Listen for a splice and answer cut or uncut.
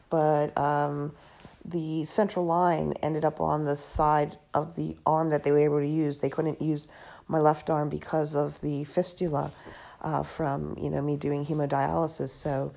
uncut